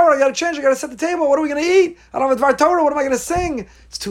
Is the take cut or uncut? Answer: uncut